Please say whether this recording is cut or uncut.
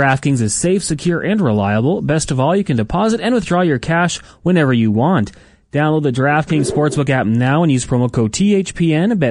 uncut